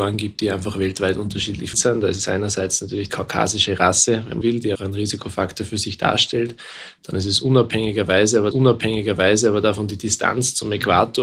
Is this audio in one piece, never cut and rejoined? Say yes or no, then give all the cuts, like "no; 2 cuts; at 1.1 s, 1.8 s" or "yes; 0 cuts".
no; 5 cuts; at 1.7 s, 3.1 s, 4.4 s, 4.7 s, 8.5 s